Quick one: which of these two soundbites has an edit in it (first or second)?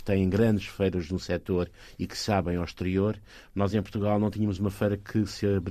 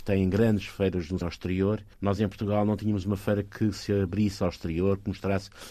second